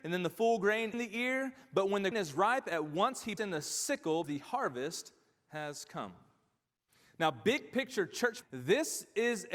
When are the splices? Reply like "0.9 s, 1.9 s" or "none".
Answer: 0.9 s, 2.1 s, 3.4 s, 4.2 s, 8.4 s